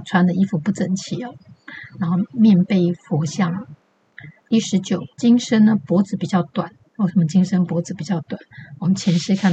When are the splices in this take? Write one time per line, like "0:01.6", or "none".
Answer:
0:05.1